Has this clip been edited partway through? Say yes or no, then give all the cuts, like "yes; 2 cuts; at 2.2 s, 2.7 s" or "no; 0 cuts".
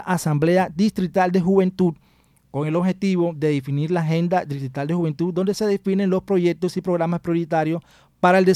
no; 0 cuts